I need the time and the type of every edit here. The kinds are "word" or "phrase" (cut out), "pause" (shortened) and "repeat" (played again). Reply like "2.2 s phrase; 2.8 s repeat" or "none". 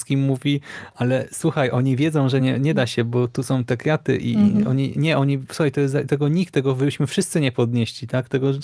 none

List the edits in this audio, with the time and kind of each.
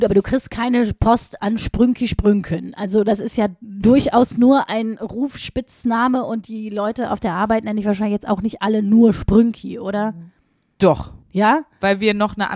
11.2 s pause

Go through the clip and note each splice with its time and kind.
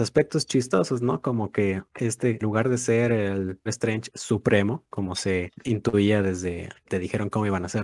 2.4 s word; 3.7 s word; 5.5 s pause; 6.8 s word

